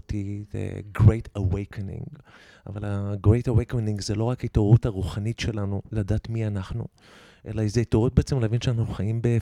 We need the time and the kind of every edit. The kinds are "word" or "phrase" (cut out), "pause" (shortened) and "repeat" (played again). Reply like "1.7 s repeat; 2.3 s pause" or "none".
none